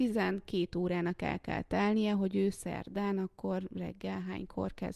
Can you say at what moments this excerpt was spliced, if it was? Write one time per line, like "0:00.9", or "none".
none